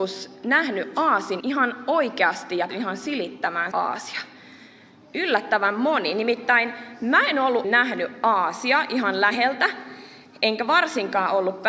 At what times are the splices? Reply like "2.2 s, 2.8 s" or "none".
1.4 s, 2.7 s, 3.7 s, 7.6 s